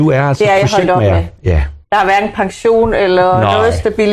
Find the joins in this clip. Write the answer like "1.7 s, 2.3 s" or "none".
1.8 s

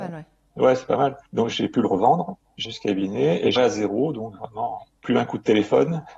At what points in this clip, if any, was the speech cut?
1.3 s, 2.6 s, 3.6 s, 4.9 s

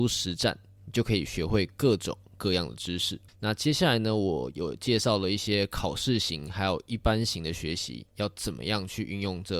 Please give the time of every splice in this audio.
3.3 s

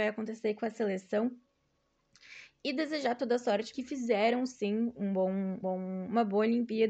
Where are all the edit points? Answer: 3.7 s, 5.6 s

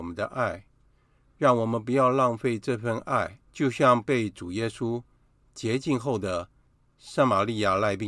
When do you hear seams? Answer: 3.4 s

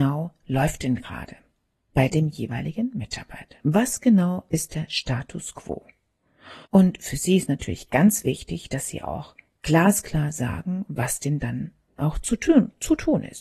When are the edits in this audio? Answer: 6.6 s

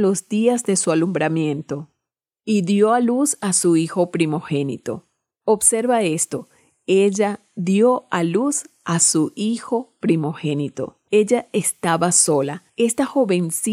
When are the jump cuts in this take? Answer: none

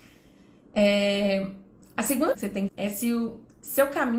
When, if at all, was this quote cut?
1.8 s, 2.3 s, 2.7 s

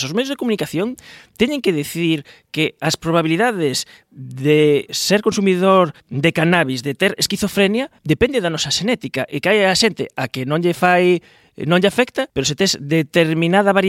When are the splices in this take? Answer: 4.9 s, 6.0 s, 8.0 s, 12.3 s

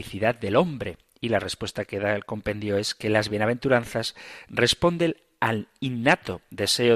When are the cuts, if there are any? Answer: none

